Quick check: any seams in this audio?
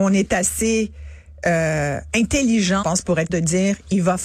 yes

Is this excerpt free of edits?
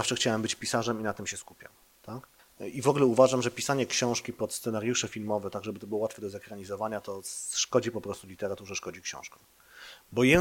no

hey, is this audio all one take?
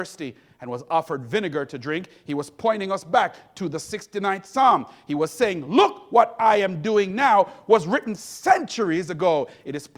yes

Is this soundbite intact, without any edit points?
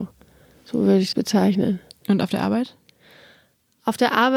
no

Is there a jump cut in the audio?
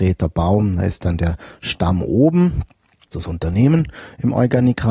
yes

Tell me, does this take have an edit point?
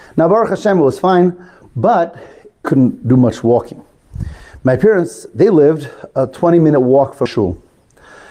yes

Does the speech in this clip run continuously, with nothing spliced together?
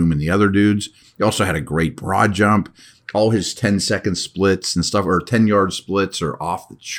yes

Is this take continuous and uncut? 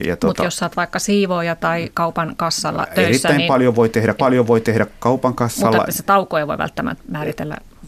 no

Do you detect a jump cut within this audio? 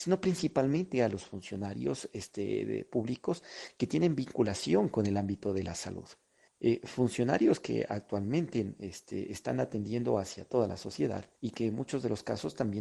yes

